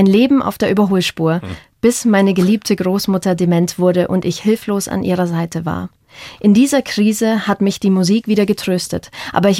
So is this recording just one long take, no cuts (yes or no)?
yes